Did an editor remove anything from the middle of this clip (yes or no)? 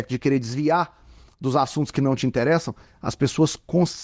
no